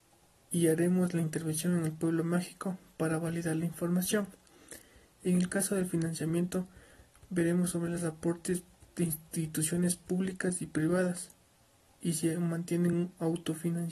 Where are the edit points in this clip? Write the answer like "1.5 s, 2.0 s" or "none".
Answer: none